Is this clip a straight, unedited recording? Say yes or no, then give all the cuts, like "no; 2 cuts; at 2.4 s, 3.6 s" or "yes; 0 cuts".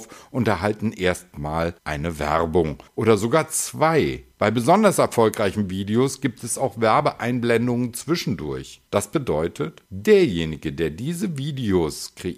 no; 5 cuts; at 1.8 s, 2.9 s, 4.3 s, 8.9 s, 9.9 s